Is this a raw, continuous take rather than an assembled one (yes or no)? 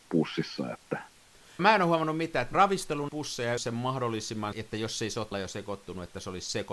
no